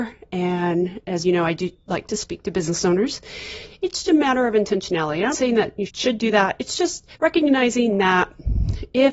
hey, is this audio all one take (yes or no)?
no